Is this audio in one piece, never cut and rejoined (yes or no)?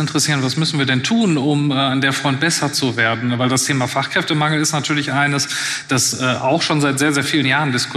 yes